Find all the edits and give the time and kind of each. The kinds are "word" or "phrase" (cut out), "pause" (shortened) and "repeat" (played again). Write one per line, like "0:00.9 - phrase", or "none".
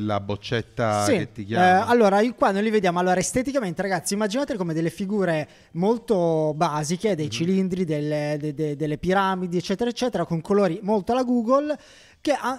none